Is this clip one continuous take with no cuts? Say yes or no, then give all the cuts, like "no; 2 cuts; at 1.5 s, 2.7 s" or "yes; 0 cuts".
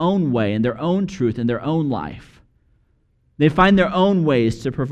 yes; 0 cuts